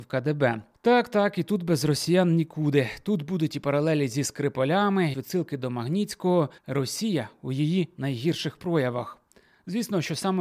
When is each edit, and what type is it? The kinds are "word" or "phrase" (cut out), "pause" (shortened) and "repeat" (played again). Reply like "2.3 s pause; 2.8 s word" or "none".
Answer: 5.1 s phrase; 6.6 s pause